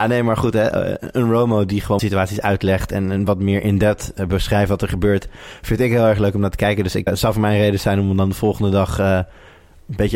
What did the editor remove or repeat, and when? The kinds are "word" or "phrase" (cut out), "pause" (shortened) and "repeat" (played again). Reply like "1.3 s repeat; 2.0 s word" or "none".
2.0 s word; 7.1 s word